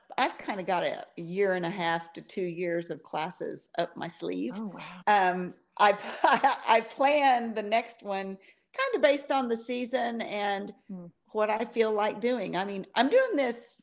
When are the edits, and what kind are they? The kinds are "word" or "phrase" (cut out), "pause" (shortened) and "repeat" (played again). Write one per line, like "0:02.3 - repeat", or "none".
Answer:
none